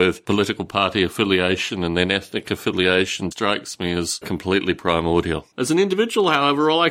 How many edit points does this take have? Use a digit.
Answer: 3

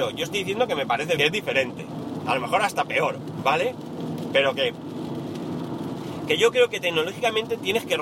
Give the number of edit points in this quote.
1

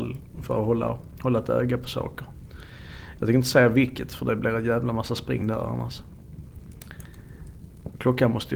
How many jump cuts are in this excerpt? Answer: 0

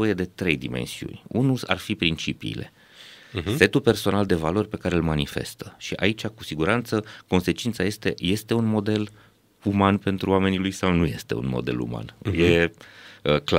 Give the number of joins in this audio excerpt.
0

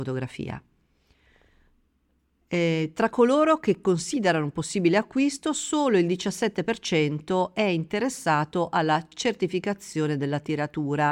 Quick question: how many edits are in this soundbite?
0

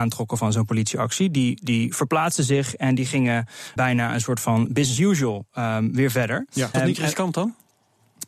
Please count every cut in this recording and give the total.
3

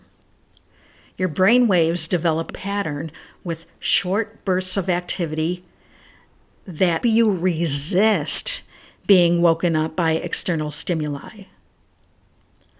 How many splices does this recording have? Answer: 2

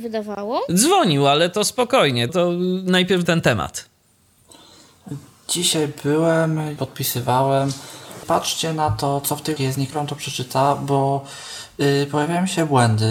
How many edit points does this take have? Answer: 6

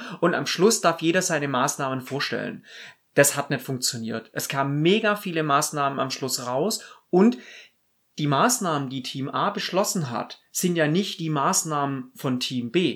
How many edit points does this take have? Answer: 0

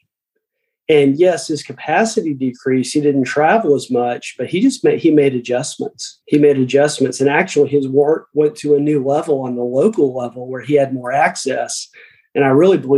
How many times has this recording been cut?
1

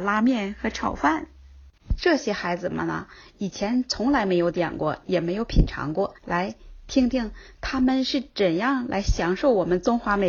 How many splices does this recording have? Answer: 1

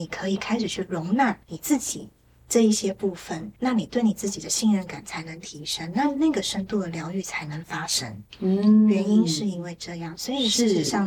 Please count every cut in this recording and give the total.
2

